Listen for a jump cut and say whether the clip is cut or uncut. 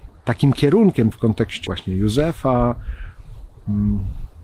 cut